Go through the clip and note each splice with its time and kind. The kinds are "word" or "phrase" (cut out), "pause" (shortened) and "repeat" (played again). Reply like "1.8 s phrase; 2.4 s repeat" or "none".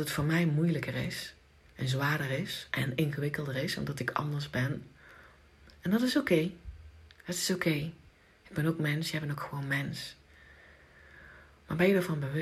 none

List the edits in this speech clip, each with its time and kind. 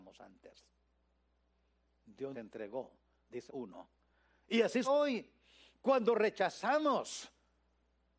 2.3 s word; 3.5 s word; 4.8 s word

